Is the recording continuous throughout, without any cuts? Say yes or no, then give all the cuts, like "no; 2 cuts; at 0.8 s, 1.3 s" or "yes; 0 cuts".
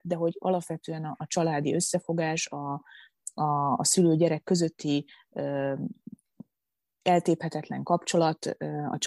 yes; 0 cuts